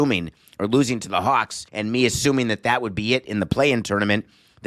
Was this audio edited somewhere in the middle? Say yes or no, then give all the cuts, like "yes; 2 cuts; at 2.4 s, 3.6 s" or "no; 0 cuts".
yes; 1 cut; at 1.7 s